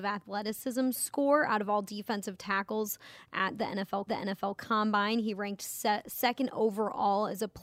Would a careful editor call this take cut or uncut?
cut